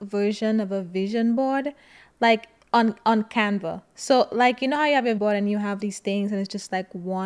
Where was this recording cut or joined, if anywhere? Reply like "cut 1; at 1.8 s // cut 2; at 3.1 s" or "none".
cut 1; at 2.6 s // cut 2; at 5.2 s // cut 3; at 5.8 s